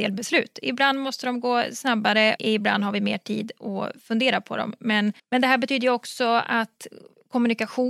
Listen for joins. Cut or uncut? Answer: cut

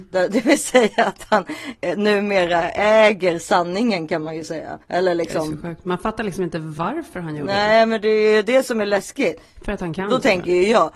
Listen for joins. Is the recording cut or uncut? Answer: cut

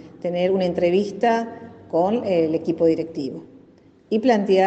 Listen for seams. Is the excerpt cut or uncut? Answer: uncut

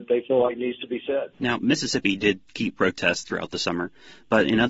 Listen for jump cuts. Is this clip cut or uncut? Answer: cut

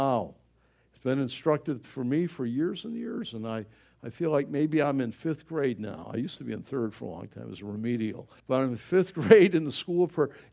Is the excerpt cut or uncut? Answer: cut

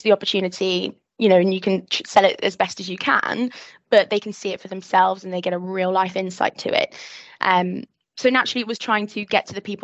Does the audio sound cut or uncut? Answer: uncut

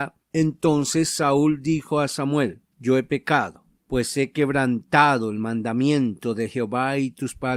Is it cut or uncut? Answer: cut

